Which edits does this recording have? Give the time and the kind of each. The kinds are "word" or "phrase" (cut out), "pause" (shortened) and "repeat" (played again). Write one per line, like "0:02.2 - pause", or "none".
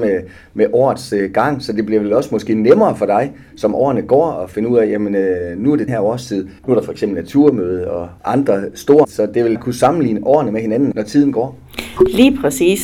0:05.9 - word
0:06.6 - pause
0:09.0 - phrase
0:09.6 - phrase
0:10.9 - word

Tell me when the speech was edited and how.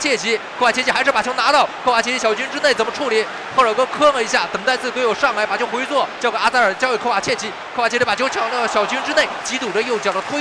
0:09.4 - phrase

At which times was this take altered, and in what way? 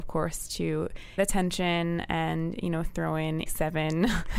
0:01.2 - word
0:03.5 - word

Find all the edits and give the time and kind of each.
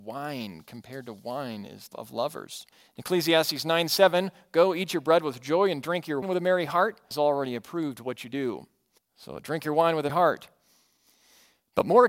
0:01.9 - word
0:02.7 - pause
0:06.2 - word
0:07.1 - phrase
0:09.0 - pause
0:10.1 - word

